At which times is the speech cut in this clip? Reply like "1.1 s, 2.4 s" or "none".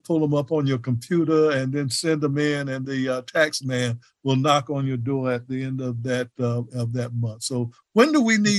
2.8 s